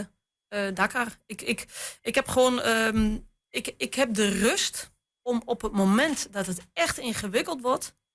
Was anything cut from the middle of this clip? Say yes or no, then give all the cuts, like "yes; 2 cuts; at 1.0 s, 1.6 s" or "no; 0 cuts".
no; 0 cuts